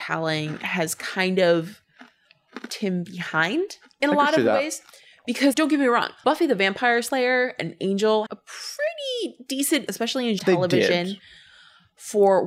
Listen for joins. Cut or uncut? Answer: cut